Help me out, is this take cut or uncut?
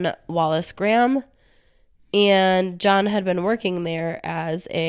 uncut